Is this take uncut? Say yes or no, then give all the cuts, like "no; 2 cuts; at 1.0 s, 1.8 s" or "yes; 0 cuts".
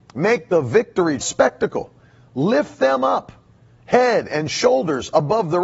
no; 1 cut; at 1.2 s